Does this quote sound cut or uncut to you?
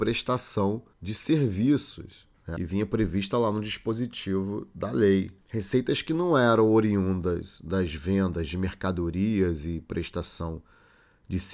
cut